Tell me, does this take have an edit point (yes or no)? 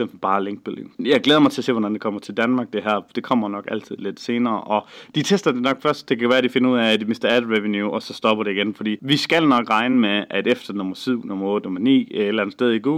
no